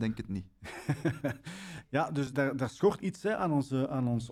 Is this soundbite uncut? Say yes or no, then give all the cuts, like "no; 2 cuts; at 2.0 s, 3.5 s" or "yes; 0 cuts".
no; 2 cuts; at 2.3 s, 3.0 s